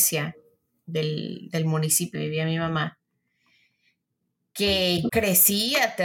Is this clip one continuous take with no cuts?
no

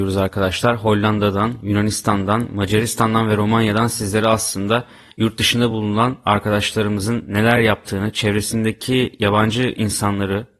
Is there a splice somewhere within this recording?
no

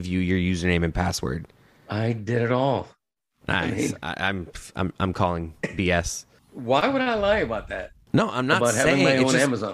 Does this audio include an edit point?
no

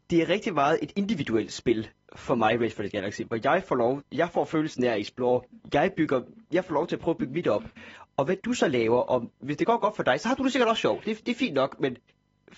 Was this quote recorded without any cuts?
yes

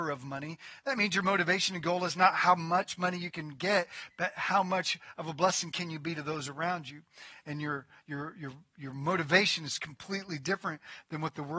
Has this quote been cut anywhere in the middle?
no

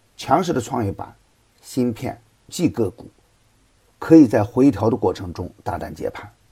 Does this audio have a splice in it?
yes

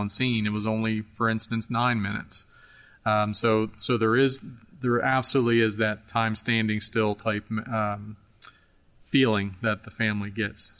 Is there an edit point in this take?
no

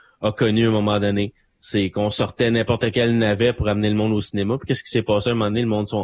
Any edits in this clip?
no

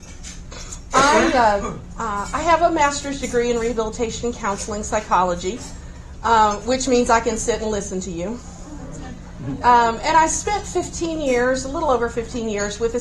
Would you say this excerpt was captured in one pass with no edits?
yes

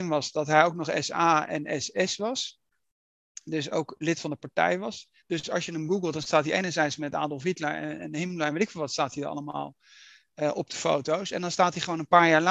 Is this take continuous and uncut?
yes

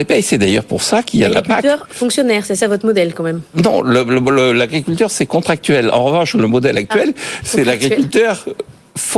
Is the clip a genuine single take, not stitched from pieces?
yes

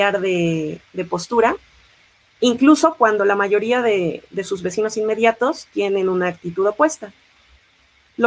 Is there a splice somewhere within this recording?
no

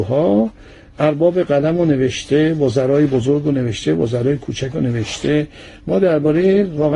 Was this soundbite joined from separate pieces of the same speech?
no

